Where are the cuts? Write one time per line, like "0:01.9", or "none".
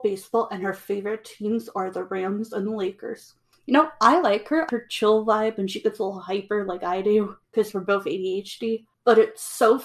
0:03.5
0:04.7
0:07.4
0:08.9